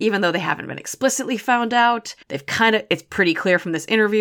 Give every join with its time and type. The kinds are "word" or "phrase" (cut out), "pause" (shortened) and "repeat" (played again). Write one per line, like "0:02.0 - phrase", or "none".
0:02.2 - pause

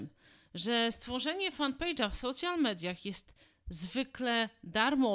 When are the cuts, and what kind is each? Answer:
none

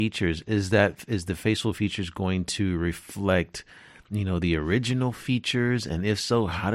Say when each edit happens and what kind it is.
none

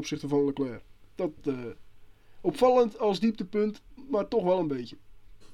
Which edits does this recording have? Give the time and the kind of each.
none

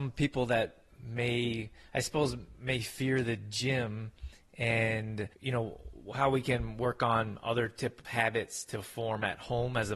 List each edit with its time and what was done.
0:05.3 - pause
0:08.0 - phrase

